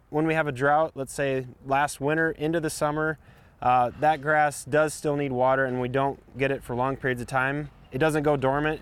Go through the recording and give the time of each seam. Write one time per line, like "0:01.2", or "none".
none